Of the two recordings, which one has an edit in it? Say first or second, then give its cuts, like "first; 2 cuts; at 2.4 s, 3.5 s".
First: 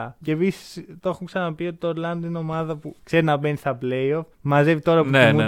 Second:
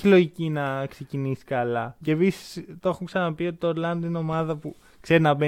first; 2 cuts; at 3.0 s, 4.3 s